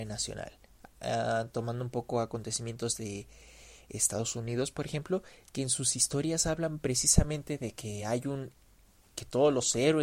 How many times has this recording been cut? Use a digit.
0